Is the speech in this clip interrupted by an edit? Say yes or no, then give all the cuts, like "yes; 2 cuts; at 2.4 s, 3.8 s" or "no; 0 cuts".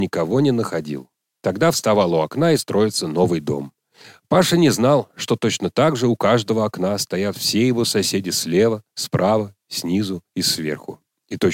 yes; 1 cut; at 2.5 s